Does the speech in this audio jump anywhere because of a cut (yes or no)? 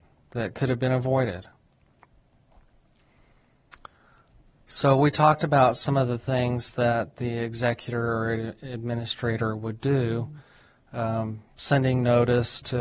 no